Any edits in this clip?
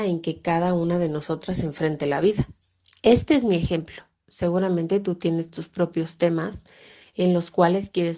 yes; 1 cut; at 2.6 s

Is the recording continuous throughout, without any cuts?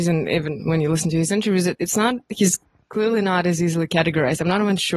yes; 0 cuts

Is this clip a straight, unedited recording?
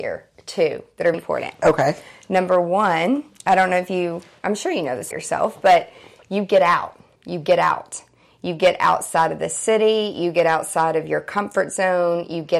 no; 3 cuts; at 1.1 s, 5.1 s, 7.2 s

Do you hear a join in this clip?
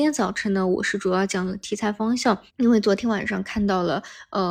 yes; 1 cut; at 2.5 s

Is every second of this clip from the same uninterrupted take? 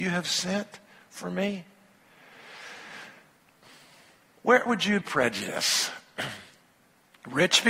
no; 2 cuts; at 4.7 s, 5.0 s

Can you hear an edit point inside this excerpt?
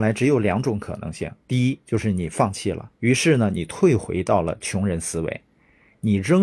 yes; 2 cuts; at 1.4 s, 3.0 s

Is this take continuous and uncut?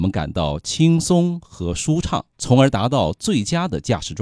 no; 1 cut; at 2.3 s

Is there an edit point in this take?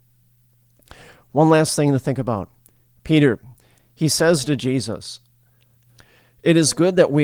no; 0 cuts

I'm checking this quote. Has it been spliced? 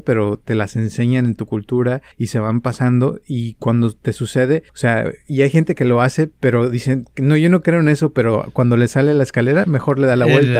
yes; 2 cuts; at 2.1 s, 4.7 s

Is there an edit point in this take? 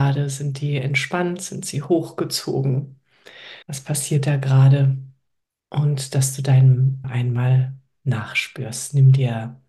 yes; 2 cuts; at 3.6 s, 7.0 s

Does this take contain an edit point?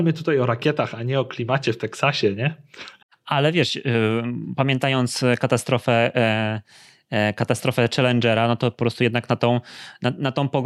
yes; 1 cut; at 3.0 s

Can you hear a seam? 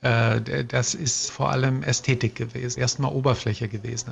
yes; 2 cuts; at 1.3 s, 2.8 s

